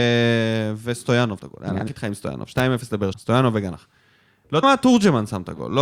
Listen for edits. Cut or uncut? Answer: cut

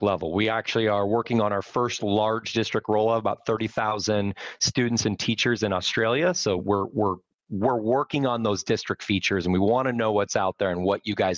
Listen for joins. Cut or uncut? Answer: uncut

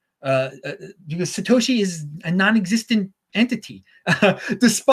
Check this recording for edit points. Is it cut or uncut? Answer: uncut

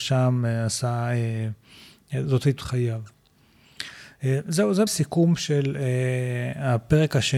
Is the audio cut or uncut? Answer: cut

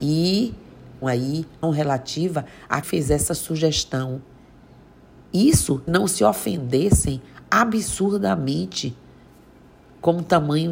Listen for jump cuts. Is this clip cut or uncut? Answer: cut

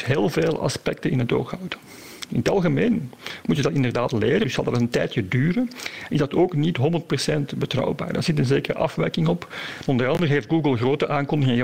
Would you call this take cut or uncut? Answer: uncut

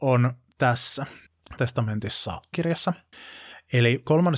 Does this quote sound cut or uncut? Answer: cut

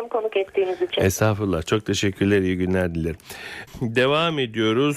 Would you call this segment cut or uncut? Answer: uncut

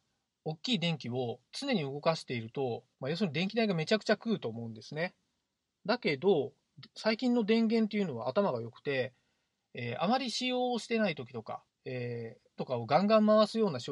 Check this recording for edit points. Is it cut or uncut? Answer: cut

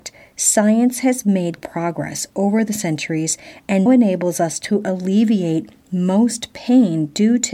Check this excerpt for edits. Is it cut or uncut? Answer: cut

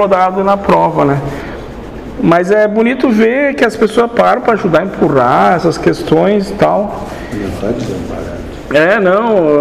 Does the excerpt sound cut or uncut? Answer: uncut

